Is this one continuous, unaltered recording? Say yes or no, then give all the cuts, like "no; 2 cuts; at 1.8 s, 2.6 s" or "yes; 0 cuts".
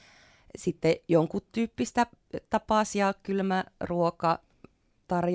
yes; 0 cuts